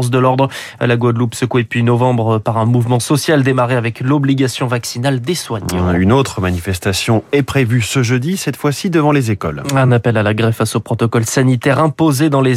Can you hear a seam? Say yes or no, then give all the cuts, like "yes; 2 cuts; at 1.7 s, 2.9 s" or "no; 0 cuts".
no; 0 cuts